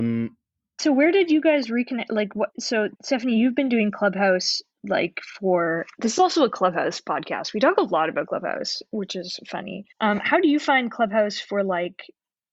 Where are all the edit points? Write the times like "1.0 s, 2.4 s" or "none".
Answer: 2.9 s, 5.9 s, 9.9 s